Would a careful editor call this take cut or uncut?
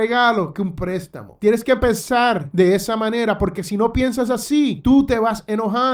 uncut